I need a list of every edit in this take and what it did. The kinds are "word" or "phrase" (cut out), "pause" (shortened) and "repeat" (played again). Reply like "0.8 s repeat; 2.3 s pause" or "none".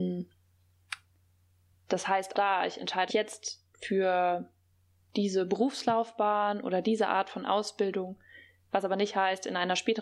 2.3 s word; 3.1 s word; 3.7 s pause